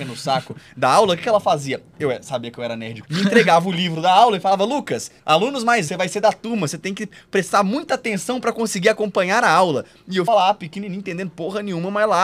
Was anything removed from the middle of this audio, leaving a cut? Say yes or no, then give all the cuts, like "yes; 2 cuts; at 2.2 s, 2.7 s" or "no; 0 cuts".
yes; 4 cuts; at 3.0 s, 5.2 s, 5.9 s, 10.3 s